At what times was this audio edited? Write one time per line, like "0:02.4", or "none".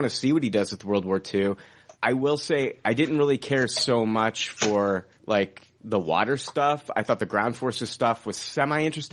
0:01.9
0:05.2